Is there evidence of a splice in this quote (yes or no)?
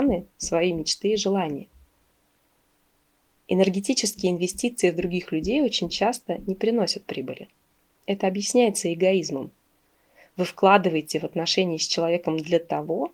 no